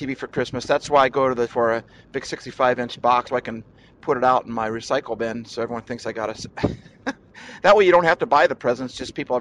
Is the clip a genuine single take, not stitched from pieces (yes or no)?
no